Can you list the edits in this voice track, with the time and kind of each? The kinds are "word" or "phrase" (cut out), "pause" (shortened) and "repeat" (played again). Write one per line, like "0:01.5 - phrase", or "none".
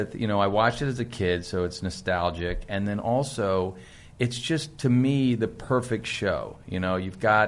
none